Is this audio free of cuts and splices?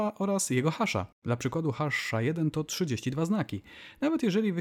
no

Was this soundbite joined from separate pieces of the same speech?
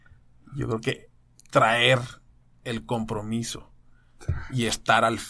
no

